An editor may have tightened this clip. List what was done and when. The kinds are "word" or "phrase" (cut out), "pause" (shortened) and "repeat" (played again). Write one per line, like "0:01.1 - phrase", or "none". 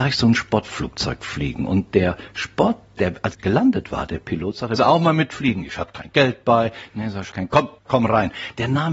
0:03.3 - word
0:04.8 - word
0:07.3 - word
0:07.8 - pause